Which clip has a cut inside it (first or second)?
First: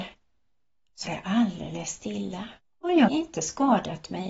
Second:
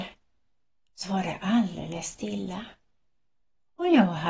first